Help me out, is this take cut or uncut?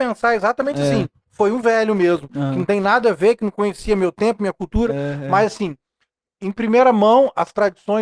uncut